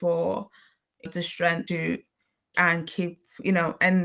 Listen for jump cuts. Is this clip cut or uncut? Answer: cut